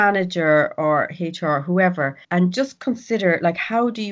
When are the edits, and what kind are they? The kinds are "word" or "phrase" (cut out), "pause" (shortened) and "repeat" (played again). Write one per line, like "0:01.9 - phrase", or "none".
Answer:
0:02.2 - pause